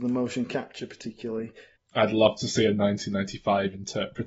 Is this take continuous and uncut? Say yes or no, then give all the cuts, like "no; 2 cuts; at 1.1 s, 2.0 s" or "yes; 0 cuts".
yes; 0 cuts